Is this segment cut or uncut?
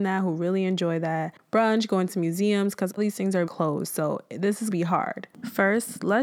cut